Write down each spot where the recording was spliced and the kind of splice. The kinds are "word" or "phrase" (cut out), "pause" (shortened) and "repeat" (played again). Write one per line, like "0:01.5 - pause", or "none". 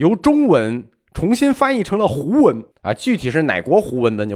0:02.7 - pause